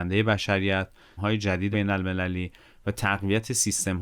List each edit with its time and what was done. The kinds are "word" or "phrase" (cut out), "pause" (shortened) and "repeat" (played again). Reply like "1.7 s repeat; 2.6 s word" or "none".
1.2 s phrase; 1.7 s word